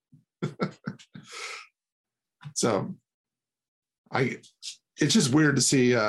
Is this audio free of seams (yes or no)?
yes